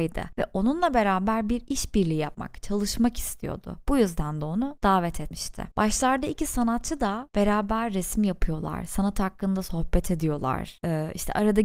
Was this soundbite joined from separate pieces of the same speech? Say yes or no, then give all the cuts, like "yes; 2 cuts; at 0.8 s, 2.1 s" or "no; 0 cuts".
no; 0 cuts